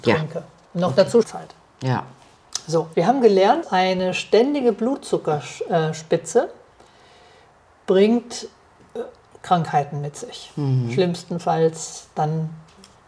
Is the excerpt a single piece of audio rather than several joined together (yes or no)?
no